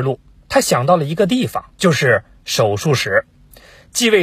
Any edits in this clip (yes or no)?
yes